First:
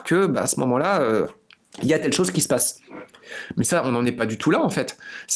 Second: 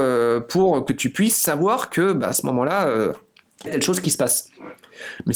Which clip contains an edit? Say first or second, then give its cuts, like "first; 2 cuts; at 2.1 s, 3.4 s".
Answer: second; 1 cut; at 3.7 s